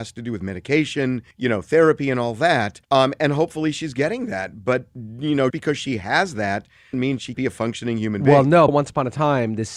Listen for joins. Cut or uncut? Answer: cut